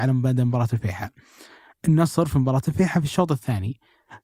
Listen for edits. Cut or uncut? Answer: uncut